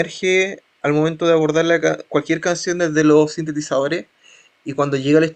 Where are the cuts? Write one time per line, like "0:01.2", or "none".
none